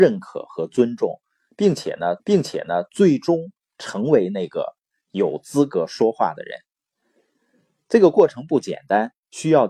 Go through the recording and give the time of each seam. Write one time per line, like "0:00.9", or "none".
0:02.2